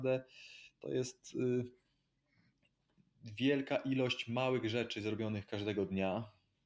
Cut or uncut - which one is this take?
uncut